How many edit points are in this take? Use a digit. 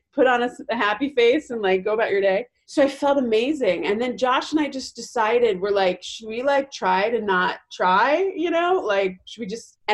0